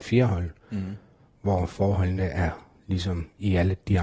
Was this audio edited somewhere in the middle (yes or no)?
no